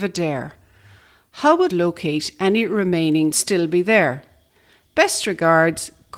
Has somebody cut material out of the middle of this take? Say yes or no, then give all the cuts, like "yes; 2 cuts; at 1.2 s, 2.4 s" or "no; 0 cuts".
yes; 2 cuts; at 1.7 s, 3.3 s